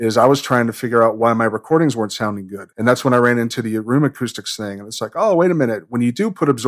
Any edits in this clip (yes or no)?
yes